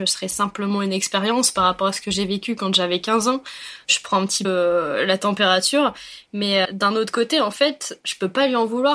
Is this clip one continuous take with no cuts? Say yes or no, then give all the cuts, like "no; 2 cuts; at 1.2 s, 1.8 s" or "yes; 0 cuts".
no; 2 cuts; at 4.4 s, 6.6 s